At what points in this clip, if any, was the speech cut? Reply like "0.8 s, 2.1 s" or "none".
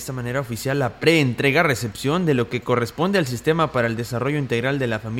none